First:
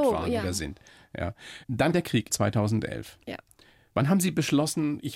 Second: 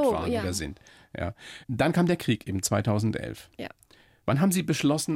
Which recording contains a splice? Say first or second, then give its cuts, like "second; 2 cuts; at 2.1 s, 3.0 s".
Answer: first; 2 cuts; at 1.9 s, 2.3 s